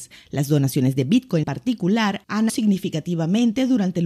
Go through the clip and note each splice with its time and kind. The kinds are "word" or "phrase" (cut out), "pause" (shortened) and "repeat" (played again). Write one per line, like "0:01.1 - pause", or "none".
0:01.4 - word
0:02.5 - word